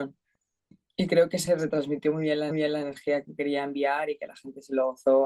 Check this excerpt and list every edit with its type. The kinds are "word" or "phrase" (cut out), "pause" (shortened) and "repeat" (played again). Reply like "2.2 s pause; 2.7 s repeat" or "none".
2.5 s repeat